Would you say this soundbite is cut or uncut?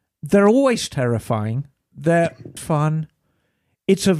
cut